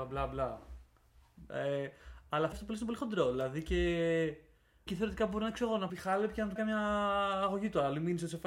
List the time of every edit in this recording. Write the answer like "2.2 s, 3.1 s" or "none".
2.5 s, 4.9 s, 5.9 s, 6.6 s